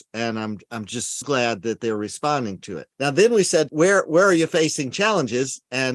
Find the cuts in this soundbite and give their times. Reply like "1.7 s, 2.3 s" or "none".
1.2 s, 2.9 s, 3.7 s